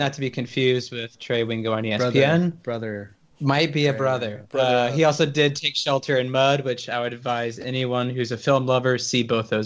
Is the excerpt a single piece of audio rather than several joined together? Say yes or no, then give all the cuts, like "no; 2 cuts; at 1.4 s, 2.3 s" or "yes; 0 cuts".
yes; 0 cuts